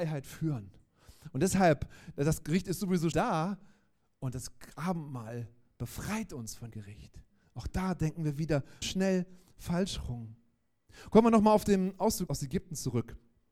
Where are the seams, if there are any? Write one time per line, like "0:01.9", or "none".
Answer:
0:03.1
0:06.7
0:08.8
0:12.3

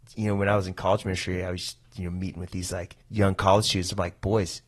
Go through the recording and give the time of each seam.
0:03.0

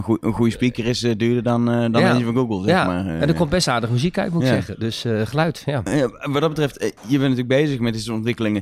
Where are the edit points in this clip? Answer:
0:07.0

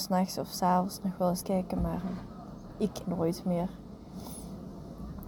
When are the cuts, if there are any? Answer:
0:01.4
0:03.0

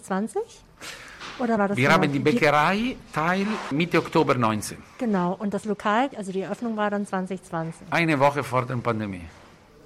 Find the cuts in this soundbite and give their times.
0:01.6
0:03.7
0:06.1

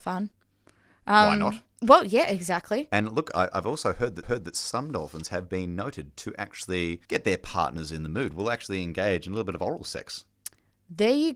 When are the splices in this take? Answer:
0:04.2
0:07.0

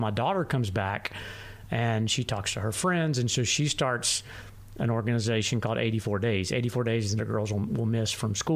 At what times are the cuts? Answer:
0:07.2

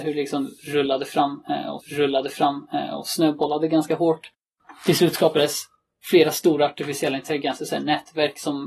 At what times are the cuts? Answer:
0:01.8

